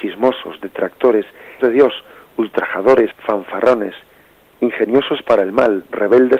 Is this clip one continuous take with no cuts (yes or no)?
no